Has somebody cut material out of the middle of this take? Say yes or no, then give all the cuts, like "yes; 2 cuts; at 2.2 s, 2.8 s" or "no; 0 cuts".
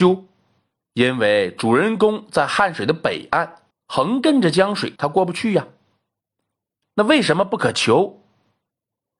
yes; 2 cuts; at 3.7 s, 5.0 s